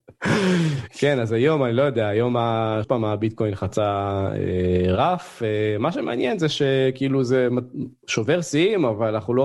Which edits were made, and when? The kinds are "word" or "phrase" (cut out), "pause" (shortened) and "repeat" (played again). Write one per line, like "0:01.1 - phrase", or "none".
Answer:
0:02.8 - word